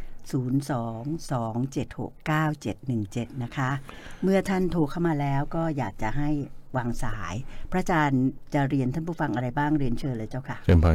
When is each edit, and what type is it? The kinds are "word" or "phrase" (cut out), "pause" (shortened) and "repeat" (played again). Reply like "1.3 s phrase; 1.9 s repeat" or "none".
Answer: 2.1 s pause